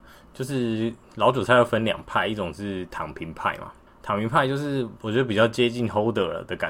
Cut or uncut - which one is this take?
cut